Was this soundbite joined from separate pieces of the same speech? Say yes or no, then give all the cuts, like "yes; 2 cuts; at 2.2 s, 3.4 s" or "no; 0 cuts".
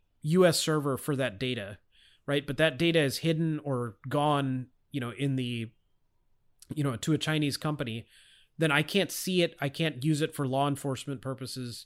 no; 0 cuts